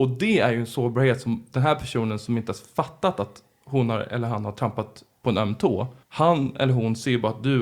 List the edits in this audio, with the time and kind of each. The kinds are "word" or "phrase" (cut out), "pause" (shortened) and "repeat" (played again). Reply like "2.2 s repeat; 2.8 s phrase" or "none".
6.0 s pause